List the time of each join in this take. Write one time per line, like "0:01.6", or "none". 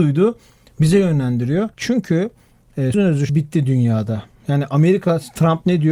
0:01.7
0:02.9
0:03.3

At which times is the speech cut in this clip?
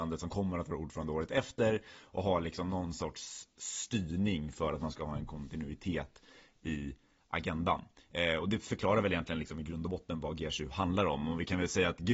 none

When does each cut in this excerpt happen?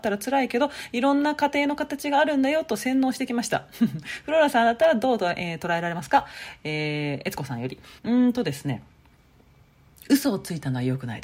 0:08.0

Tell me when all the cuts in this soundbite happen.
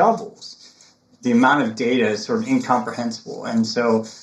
none

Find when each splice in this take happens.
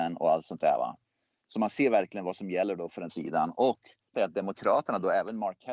0:03.1
0:04.1

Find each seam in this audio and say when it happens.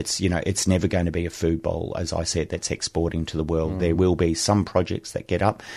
none

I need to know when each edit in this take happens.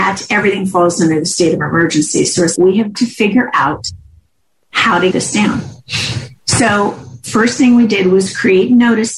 0:02.6
0:02.9
0:05.1

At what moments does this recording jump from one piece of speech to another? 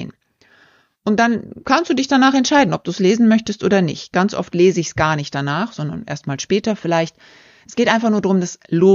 none

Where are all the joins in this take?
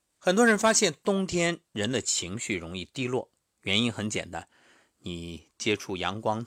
none

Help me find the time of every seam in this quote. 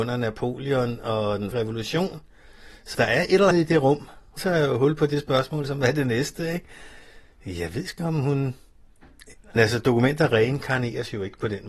0:01.5
0:02.9
0:03.5
0:04.4
0:08.0
0:09.6

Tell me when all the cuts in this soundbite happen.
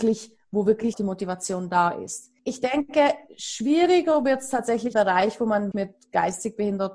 0:00.9
0:02.4
0:04.9
0:05.7

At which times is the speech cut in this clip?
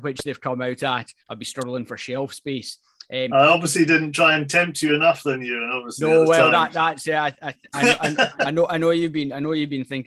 0:01.2

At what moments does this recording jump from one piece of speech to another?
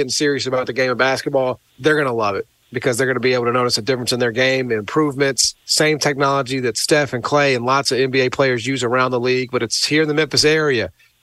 0:01.7
0:05.6

